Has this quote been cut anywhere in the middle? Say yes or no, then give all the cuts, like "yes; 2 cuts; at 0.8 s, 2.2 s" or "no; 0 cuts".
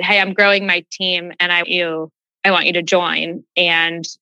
yes; 1 cut; at 1.6 s